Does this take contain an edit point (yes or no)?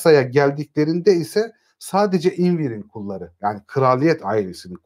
no